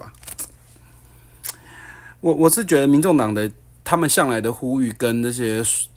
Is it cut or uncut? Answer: uncut